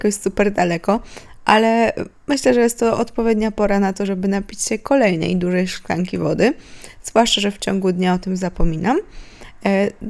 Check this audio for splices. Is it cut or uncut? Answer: cut